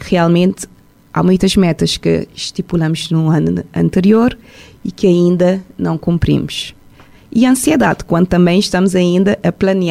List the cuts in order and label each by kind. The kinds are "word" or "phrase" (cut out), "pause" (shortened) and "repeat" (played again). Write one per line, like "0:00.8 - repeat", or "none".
none

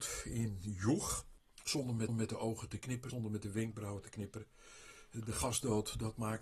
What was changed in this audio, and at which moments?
0:02.1 - repeat
0:03.1 - word

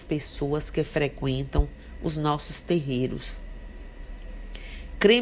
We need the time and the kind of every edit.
none

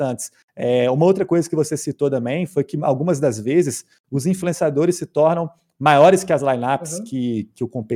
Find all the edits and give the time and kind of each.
none

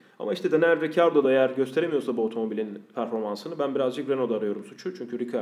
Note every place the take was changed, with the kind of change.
none

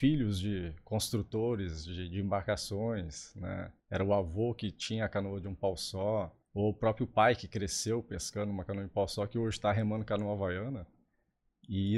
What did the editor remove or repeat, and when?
0:03.8 - pause
0:06.4 - pause

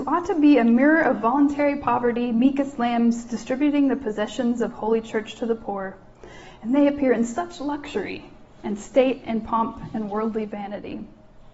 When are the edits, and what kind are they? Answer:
none

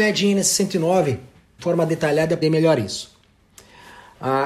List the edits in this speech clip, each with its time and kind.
0:01.6 - word
0:02.4 - word

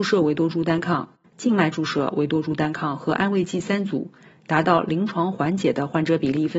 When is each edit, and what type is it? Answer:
none

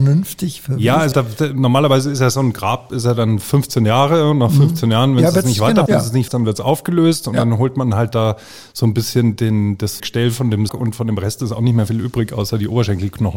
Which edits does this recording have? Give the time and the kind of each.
0:01.1 - word
0:05.9 - word
0:06.3 - word
0:09.4 - word
0:10.0 - word
0:10.7 - word

